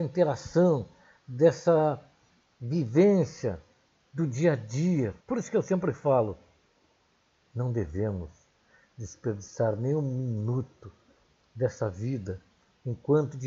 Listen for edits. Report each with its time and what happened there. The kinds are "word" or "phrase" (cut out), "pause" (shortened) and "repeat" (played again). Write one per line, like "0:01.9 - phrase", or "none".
0:05.2 - pause